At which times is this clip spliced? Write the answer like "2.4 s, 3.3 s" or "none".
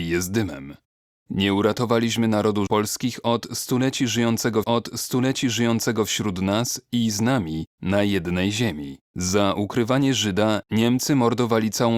2.7 s, 4.6 s, 9.0 s